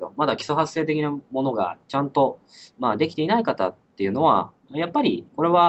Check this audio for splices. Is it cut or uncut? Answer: cut